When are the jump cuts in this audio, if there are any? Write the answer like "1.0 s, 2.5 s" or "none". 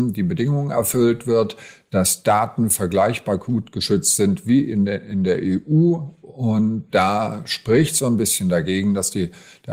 none

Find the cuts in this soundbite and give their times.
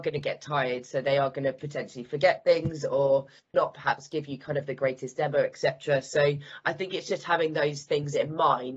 3.5 s

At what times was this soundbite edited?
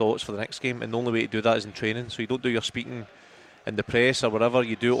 none

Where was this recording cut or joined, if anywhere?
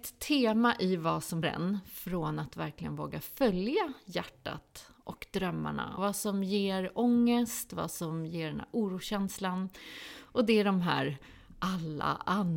1.4 s, 6.0 s

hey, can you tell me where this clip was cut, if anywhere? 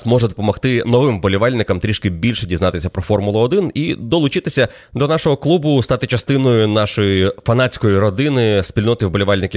none

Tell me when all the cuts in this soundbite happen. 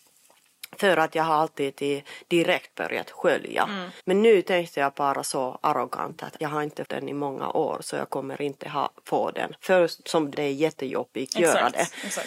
4.0 s, 6.4 s, 6.8 s, 10.3 s

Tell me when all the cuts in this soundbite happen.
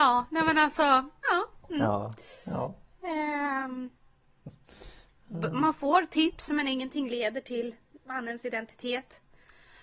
none

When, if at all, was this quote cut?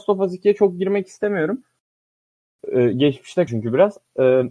3.5 s

